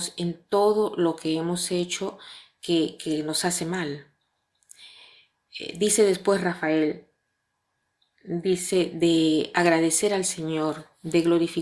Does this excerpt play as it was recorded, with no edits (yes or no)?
yes